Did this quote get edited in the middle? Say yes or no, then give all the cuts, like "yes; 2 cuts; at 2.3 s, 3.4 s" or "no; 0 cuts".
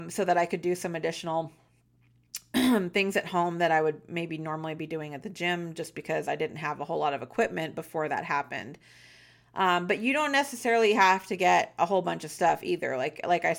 no; 0 cuts